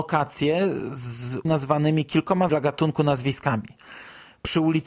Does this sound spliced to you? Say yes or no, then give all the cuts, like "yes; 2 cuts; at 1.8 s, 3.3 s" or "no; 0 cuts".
yes; 2 cuts; at 1.4 s, 2.5 s